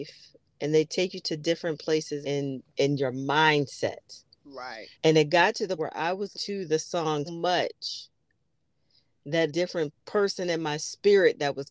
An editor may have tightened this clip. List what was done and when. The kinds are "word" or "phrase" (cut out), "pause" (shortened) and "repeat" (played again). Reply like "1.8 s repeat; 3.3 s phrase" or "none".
2.2 s word; 2.7 s pause; 4.9 s pause; 5.8 s word; 6.3 s word; 7.3 s word; 9.5 s phrase; 10.0 s pause